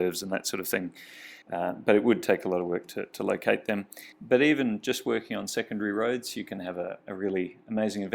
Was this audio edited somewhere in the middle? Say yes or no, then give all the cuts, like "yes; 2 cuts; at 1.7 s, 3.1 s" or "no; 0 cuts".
yes; 2 cuts; at 1.4 s, 4.1 s